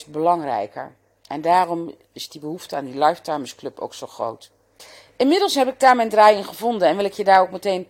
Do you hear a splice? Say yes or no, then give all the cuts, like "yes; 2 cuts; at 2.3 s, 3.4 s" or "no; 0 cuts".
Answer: no; 0 cuts